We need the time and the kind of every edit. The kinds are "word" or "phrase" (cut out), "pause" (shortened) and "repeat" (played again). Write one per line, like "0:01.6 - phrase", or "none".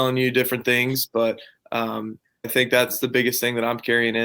0:02.4 - word